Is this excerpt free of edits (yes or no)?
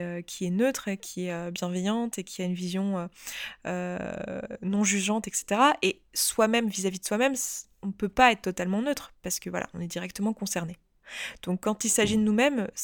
yes